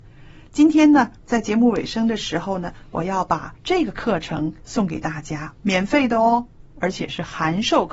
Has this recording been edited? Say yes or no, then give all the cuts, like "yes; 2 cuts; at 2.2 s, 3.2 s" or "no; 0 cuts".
yes; 2 cuts; at 3.6 s, 4.6 s